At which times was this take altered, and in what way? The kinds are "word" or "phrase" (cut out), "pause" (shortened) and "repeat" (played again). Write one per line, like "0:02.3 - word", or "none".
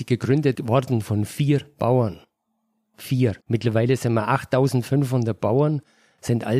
0:03.4 - pause